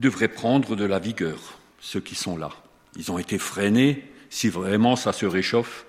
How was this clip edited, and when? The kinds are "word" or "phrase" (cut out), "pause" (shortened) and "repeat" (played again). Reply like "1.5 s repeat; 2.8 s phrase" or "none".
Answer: none